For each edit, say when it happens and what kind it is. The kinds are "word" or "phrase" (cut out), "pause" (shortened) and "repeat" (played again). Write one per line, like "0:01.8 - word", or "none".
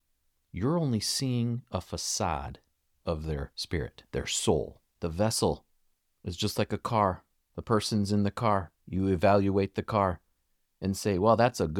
0:04.1 - pause
0:04.9 - pause
0:07.3 - pause
0:08.8 - pause